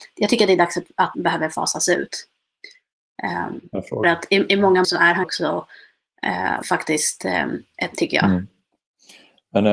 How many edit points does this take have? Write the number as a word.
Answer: six